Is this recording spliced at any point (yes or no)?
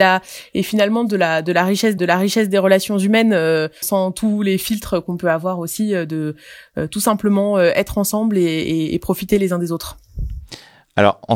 yes